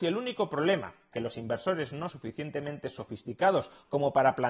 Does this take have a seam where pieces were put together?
yes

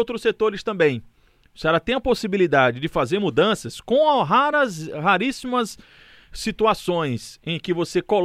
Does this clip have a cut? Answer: no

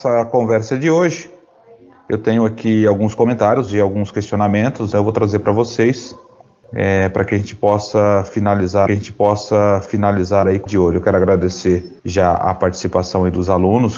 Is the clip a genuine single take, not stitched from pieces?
no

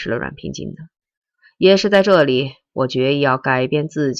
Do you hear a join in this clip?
no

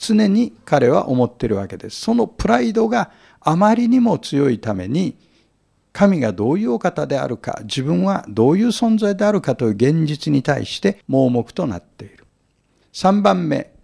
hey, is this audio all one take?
no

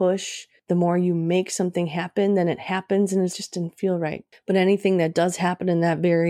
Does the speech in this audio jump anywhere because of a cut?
yes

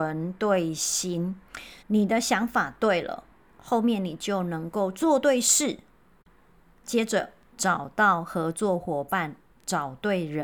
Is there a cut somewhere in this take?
yes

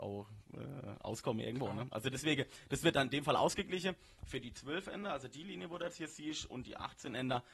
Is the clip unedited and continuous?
yes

